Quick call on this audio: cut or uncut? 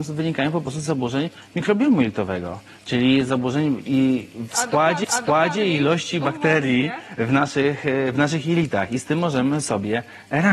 cut